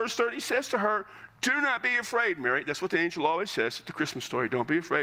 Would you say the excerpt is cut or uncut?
uncut